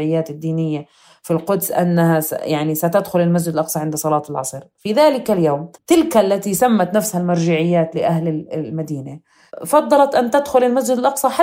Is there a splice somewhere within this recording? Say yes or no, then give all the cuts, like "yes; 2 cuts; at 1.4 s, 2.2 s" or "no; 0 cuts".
yes; 1 cut; at 5.7 s